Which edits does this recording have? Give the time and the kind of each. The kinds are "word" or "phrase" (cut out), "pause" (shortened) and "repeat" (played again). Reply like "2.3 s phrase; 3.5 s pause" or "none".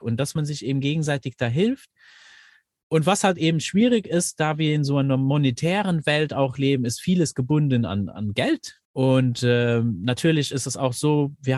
8.8 s pause